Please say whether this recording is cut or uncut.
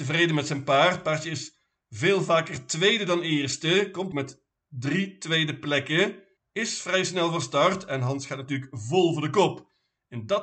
cut